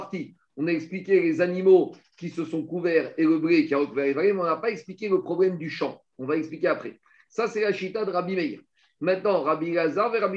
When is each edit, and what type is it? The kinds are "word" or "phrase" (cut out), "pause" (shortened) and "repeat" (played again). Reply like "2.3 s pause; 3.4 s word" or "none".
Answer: none

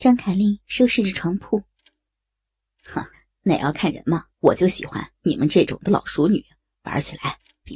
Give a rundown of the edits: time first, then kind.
3.1 s pause; 4.3 s pause; 6.6 s pause

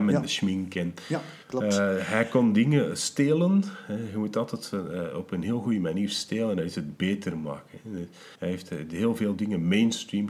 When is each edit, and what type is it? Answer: 1.4 s pause; 8.3 s pause

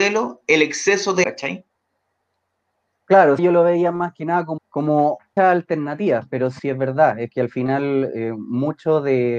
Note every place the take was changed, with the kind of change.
1.2 s word; 3.4 s word; 4.6 s word; 5.4 s word; 6.6 s word; 7.3 s word

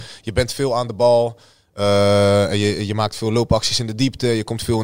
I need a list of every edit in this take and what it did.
none

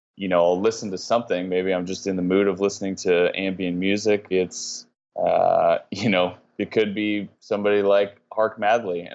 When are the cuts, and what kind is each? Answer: 4.3 s word; 7.4 s pause

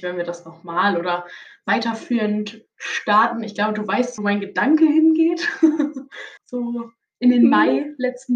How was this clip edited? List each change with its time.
4.2 s word; 6.4 s pause

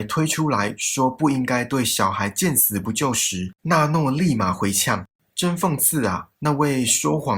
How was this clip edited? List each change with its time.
3.6 s pause

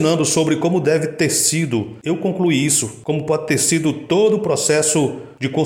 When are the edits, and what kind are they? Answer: 3.0 s phrase

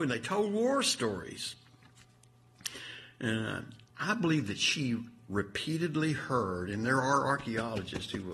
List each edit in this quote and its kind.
3.9 s pause

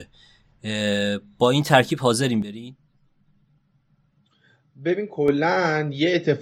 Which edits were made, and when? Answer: none

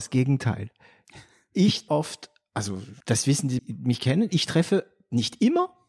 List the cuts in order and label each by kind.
1.9 s word; 3.0 s pause; 3.6 s word

